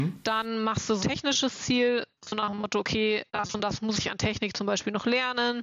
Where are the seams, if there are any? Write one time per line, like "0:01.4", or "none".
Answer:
0:01.0
0:03.3